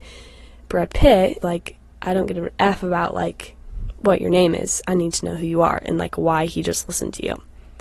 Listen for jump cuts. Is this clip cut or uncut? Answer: cut